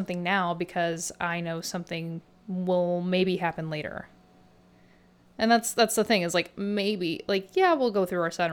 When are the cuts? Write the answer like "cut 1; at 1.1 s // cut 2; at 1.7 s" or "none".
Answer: none